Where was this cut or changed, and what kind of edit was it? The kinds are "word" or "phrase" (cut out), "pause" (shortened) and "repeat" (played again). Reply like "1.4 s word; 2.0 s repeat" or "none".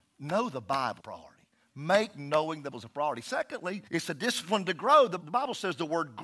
1.0 s phrase; 2.7 s word; 3.9 s pause; 5.2 s word

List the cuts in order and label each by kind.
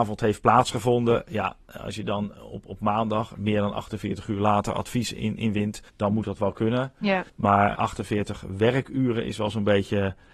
5.9 s pause; 7.3 s pause

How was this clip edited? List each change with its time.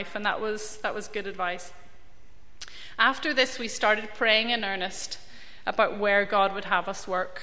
none

